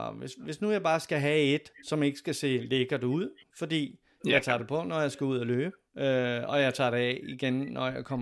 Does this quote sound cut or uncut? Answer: cut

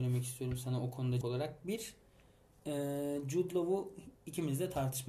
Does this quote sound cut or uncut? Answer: cut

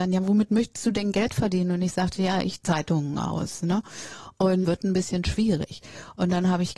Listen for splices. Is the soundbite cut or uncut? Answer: cut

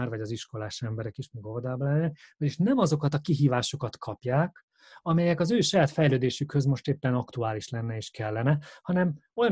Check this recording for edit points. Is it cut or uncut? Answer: uncut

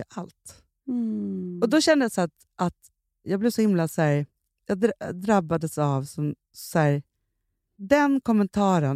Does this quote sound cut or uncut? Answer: uncut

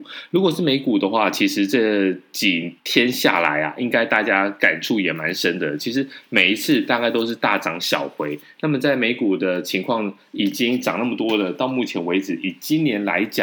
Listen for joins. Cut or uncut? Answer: cut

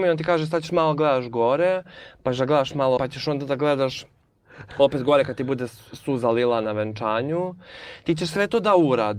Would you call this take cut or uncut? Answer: cut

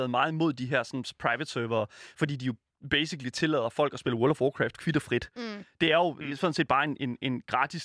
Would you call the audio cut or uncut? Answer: uncut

